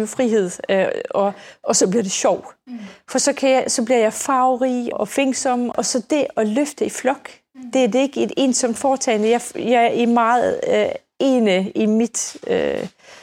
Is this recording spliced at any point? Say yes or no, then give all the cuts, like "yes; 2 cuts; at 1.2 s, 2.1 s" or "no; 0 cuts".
yes; 2 cuts; at 4.9 s, 5.7 s